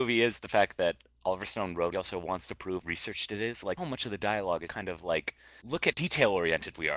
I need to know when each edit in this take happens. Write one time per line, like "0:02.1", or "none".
0:01.9
0:02.8
0:03.8
0:04.7
0:05.6
0:05.9